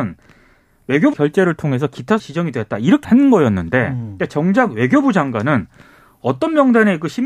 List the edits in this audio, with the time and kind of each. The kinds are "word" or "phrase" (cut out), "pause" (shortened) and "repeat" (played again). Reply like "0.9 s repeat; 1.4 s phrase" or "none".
1.1 s word; 2.2 s word; 3.0 s word